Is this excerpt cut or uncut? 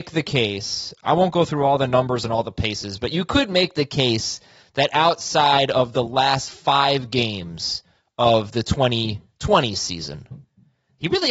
uncut